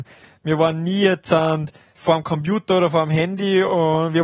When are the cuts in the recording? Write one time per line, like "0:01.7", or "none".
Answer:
none